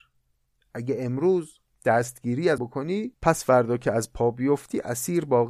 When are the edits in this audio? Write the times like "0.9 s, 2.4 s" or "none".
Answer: 2.6 s, 3.1 s